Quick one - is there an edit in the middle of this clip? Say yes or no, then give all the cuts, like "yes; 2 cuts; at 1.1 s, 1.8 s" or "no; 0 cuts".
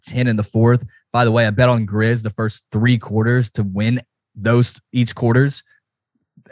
no; 0 cuts